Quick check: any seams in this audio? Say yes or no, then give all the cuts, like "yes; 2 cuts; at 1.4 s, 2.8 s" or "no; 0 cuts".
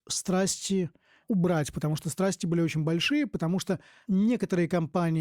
no; 0 cuts